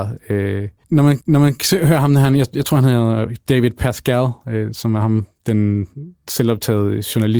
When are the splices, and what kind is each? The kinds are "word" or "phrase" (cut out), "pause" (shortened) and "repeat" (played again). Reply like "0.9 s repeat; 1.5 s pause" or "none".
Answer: 1.2 s repeat